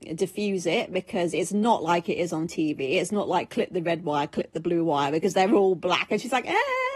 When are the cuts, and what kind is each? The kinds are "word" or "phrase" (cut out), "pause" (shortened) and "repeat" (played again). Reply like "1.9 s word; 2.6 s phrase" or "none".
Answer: none

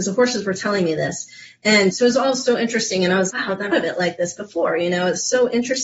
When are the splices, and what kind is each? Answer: 1.9 s word; 3.3 s word; 3.7 s phrase

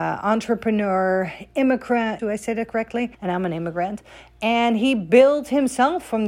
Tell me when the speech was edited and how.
2.2 s phrase; 3.1 s pause

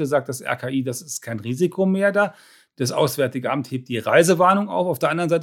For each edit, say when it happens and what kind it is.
none

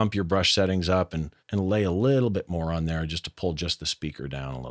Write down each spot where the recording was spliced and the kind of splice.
1.4 s pause

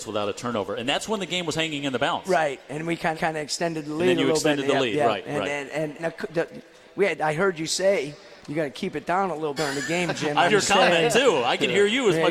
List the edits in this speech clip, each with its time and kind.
3.1 s repeat; 6.0 s word; 8.4 s pause; 9.6 s word; 10.5 s word

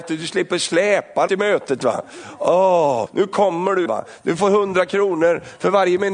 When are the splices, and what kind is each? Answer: 1.3 s word; 3.1 s word; 3.9 s word

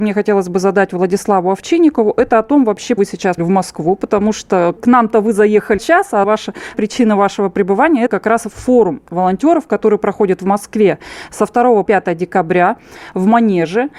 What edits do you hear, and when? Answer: 3.0 s word; 3.4 s word; 4.8 s word; 5.8 s word; 6.2 s word; 6.7 s word; 8.1 s word; 11.9 s word

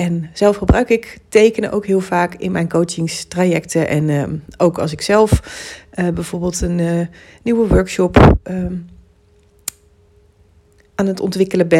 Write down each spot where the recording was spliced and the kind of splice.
none

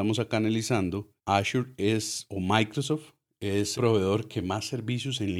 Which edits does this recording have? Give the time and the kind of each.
1.2 s pause; 3.7 s word

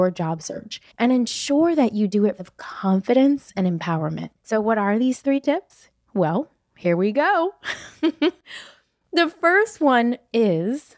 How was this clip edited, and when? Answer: 0.9 s pause; 2.4 s phrase; 4.4 s pause

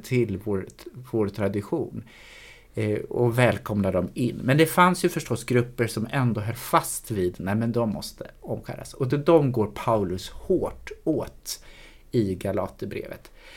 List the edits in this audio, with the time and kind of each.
none

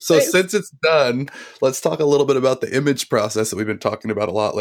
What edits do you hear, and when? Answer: none

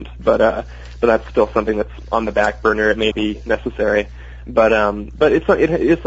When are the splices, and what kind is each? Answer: 3.1 s word

